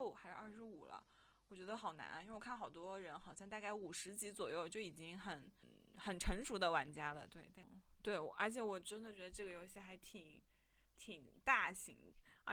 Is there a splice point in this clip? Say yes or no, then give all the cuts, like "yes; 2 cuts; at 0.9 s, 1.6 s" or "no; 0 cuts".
no; 0 cuts